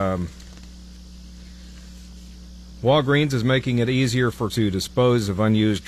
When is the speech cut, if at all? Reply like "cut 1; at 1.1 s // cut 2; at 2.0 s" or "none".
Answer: cut 1; at 4.5 s